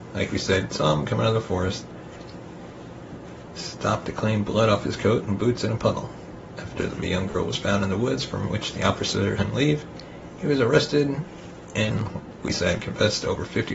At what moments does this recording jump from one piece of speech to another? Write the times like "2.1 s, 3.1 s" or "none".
7.0 s, 9.4 s, 12.4 s